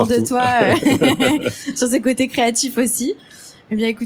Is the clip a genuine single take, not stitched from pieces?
yes; 0 cuts

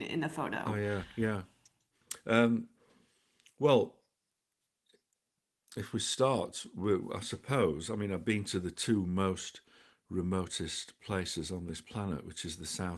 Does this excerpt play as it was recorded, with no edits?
yes; 0 cuts

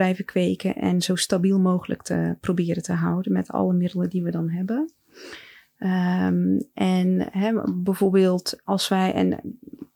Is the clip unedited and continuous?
yes; 0 cuts

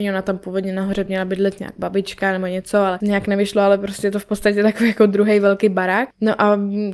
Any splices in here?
no; 0 cuts

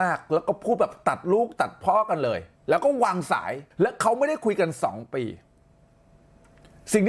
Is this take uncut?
no; 2 cuts; at 2.6 s, 3.7 s

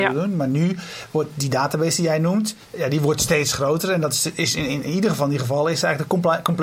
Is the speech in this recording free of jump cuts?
no; 1 cut; at 2.6 s

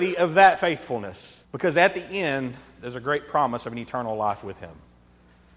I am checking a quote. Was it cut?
yes; 1 cut; at 1.4 s

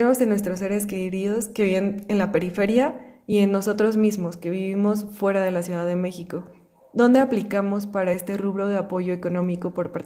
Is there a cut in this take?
no; 0 cuts

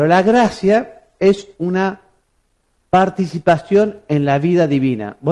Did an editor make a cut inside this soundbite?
no; 0 cuts

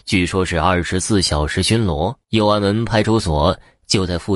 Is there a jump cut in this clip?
yes; 1 cut; at 2.2 s

